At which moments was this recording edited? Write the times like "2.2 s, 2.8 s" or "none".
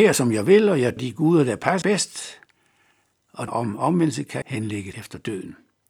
1.0 s, 1.8 s, 3.5 s, 4.4 s, 4.9 s